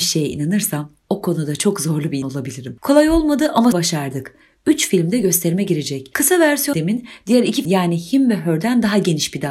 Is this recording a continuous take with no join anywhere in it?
no; 4 cuts; at 2.2 s, 3.7 s, 6.7 s, 7.6 s

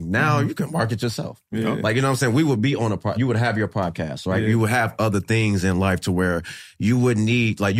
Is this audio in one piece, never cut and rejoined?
no; 1 cut; at 3.2 s

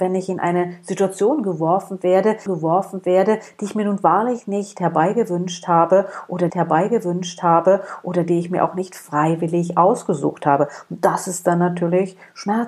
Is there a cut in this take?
yes; 2 cuts; at 2.5 s, 6.5 s

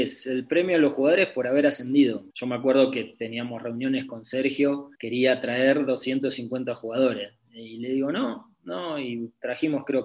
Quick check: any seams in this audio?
yes; 2 cuts; at 2.3 s, 4.9 s

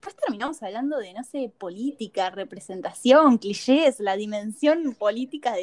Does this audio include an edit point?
no; 0 cuts

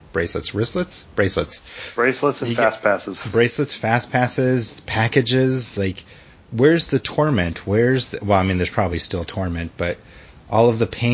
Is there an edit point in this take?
no; 0 cuts

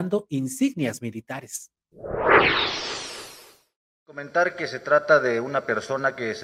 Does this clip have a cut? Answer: no; 0 cuts

